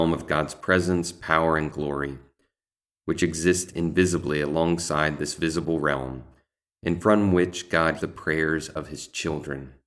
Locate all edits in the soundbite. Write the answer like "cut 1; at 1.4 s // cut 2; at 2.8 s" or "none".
cut 1; at 8.0 s